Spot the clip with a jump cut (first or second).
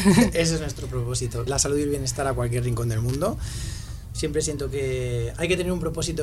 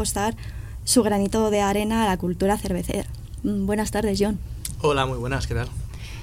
first